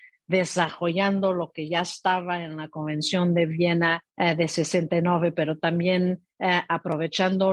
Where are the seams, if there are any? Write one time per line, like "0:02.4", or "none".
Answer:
0:04.1
0:06.3